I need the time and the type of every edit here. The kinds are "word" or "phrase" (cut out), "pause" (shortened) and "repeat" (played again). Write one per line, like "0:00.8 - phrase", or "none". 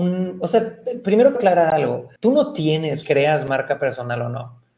0:01.3 - word
0:02.2 - pause
0:03.0 - phrase